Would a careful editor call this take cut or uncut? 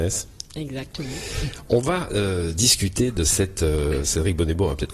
uncut